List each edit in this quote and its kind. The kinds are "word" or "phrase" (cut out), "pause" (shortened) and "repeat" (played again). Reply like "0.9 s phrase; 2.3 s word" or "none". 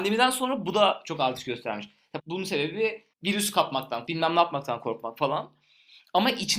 2.2 s word; 3.1 s pause; 4.1 s word